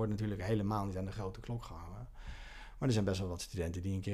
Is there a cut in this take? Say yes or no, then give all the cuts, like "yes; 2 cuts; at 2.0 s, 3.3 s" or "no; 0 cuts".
no; 0 cuts